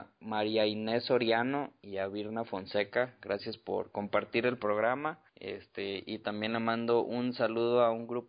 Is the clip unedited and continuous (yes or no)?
no